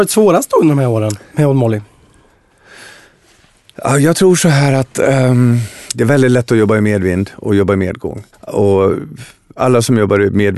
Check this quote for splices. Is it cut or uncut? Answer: cut